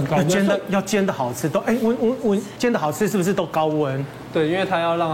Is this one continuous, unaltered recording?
no; 1 cut; at 2.6 s

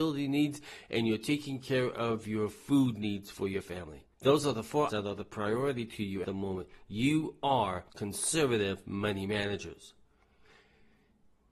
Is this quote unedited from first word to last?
no; 4 cuts; at 4.1 s, 4.9 s, 6.2 s, 7.9 s

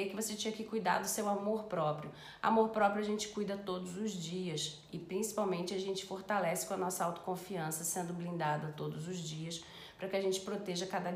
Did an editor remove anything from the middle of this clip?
no; 0 cuts

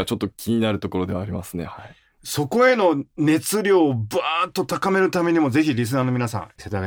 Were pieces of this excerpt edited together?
no; 0 cuts

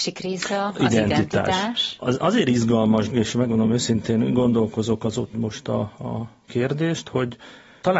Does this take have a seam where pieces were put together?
yes; 2 cuts; at 3.1 s, 5.3 s

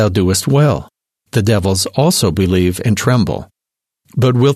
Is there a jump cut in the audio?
no; 0 cuts

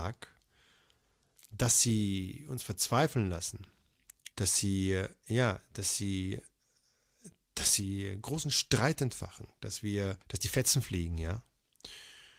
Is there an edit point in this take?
yes; 2 cuts; at 4.3 s, 10.2 s

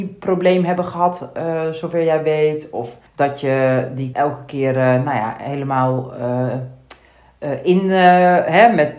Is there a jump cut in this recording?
yes; 2 cuts; at 3.1 s, 4.1 s

